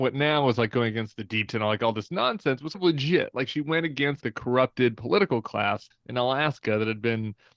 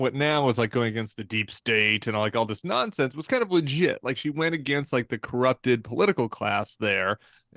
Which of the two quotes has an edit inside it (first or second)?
first